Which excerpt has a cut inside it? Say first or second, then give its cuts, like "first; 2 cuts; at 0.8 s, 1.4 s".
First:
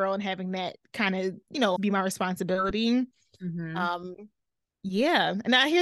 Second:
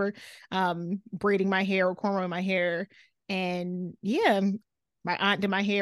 first; 1 cut; at 1.8 s